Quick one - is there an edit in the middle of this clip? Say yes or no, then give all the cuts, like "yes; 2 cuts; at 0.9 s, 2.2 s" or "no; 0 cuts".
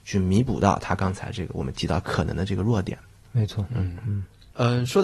no; 0 cuts